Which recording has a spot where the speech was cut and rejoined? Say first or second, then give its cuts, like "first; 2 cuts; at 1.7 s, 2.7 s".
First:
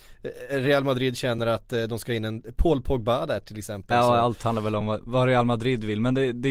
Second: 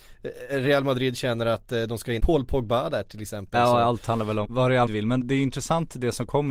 second; 4 cuts; at 2.2 s, 4.4 s, 4.9 s, 5.2 s